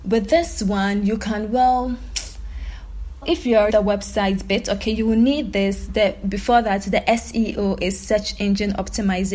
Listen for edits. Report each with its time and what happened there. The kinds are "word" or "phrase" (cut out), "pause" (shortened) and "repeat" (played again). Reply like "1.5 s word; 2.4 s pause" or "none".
3.2 s word; 3.7 s word